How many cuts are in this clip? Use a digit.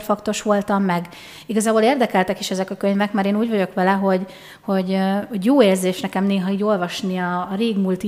0